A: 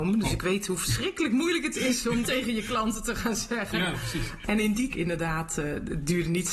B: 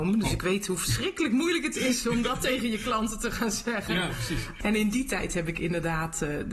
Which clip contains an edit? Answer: A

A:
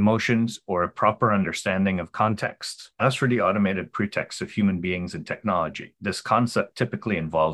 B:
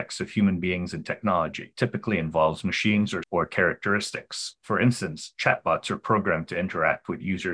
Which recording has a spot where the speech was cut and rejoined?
B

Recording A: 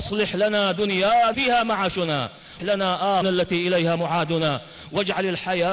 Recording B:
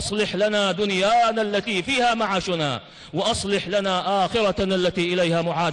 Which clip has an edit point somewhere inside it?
A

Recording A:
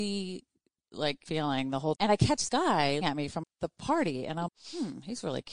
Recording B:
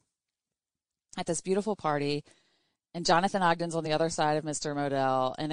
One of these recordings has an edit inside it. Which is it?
A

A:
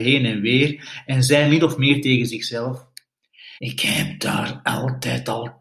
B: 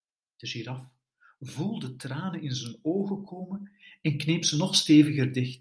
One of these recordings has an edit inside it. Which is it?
A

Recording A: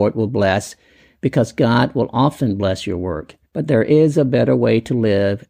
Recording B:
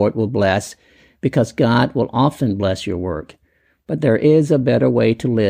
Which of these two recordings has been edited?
A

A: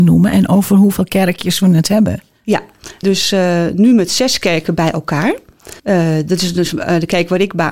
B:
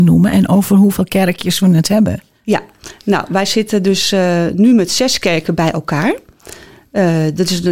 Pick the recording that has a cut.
A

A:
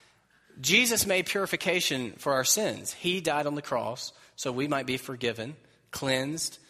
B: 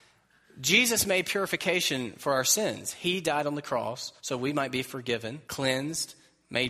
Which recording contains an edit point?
B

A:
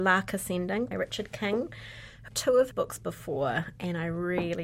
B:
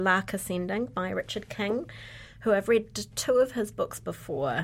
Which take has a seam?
A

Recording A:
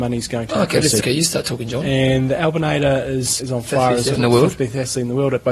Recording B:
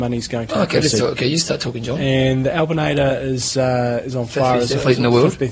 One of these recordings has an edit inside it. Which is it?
A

